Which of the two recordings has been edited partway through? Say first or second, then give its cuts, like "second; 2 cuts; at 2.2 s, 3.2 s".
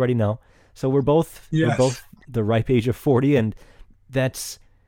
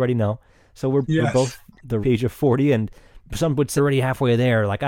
second; 4 cuts; at 1.0 s, 2.0 s, 3.2 s, 3.8 s